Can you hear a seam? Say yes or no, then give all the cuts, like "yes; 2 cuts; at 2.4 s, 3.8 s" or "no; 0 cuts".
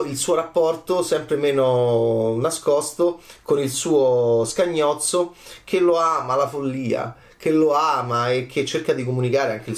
no; 0 cuts